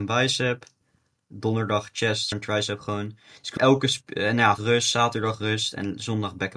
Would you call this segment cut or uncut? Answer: cut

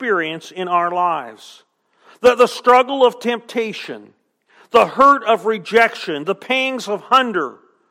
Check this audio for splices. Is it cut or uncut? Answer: uncut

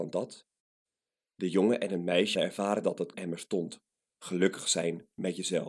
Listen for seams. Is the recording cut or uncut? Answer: cut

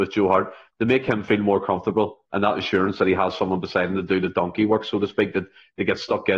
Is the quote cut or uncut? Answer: uncut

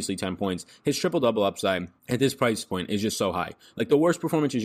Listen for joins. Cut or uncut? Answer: cut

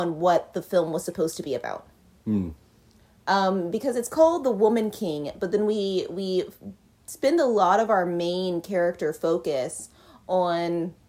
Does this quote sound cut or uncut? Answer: uncut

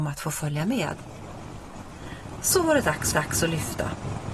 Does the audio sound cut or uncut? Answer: cut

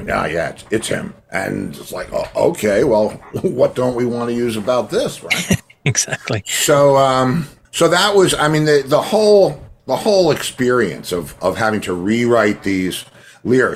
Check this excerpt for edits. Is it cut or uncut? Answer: cut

